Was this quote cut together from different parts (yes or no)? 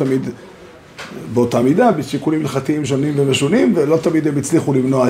no